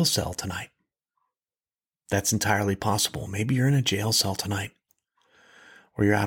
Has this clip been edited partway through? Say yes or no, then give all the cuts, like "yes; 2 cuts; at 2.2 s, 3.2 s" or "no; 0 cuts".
no; 0 cuts